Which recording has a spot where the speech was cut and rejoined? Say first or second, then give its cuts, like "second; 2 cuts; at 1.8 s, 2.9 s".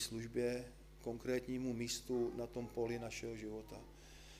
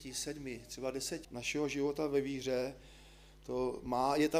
second; 1 cut; at 1.2 s